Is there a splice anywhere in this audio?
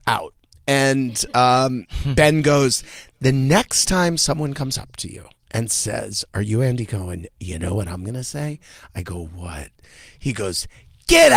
no; 0 cuts

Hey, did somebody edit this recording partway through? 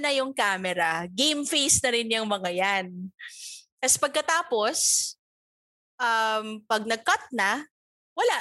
no; 0 cuts

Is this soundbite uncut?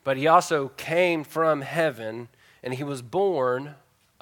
yes; 0 cuts

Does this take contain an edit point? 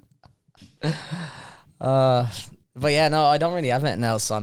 yes; 1 cut; at 2.6 s

